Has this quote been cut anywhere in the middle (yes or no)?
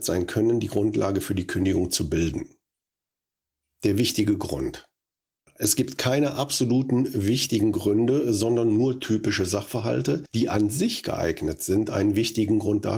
no